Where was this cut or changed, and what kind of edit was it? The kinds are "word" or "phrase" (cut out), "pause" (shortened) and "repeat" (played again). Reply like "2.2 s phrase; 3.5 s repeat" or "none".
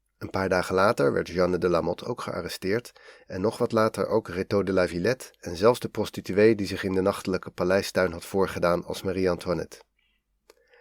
none